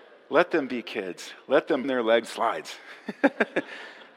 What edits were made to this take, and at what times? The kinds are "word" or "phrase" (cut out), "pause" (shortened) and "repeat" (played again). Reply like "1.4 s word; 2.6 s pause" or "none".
1.8 s word; 2.3 s word